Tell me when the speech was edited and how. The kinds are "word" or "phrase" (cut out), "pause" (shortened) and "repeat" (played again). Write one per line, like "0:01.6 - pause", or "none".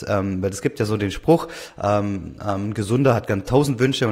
none